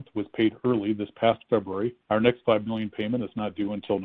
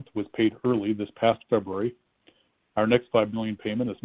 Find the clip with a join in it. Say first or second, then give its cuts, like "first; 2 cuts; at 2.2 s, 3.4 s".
first; 1 cut; at 2.0 s